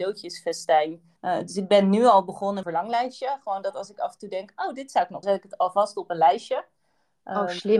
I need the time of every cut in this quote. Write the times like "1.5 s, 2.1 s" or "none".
1.2 s, 2.6 s, 5.2 s